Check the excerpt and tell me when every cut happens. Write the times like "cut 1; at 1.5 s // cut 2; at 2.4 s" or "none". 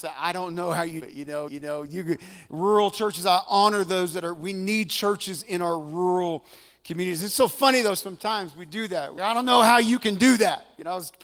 cut 1; at 1.0 s // cut 2; at 1.5 s // cut 3; at 9.2 s